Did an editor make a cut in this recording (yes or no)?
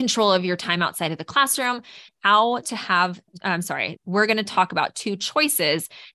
yes